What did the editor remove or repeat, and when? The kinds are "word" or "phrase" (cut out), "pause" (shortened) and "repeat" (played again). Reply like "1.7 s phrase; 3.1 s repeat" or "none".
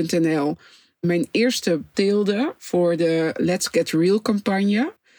1.9 s word

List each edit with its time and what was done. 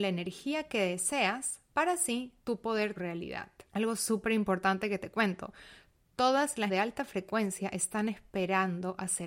2.4 s pause; 3.0 s phrase; 3.7 s pause; 6.7 s word

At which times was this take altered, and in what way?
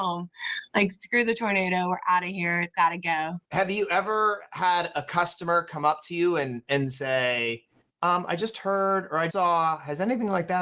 3.4 s pause; 9.3 s word

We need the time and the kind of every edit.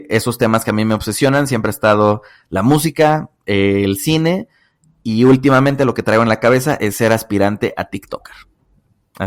none

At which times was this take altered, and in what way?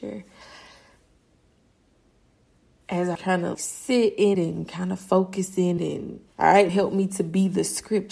3.2 s word; 3.5 s word; 4.3 s word; 5.8 s word; 6.3 s pause; 6.7 s word

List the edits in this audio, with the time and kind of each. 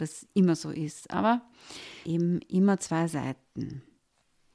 2.0 s phrase

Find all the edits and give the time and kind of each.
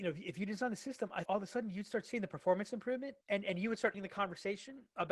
1.2 s word; 3.2 s pause; 3.9 s word

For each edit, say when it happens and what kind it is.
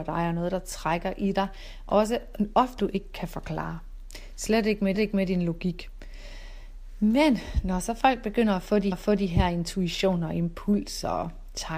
2.8 s word; 4.9 s repeat; 8.9 s repeat

